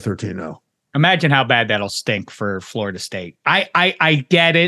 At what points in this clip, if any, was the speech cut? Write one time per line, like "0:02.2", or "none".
none